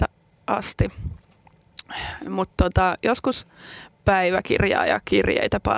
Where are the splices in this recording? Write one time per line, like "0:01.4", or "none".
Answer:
0:03.9